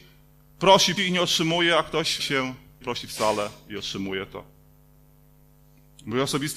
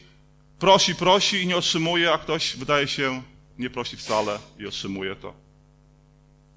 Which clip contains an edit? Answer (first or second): first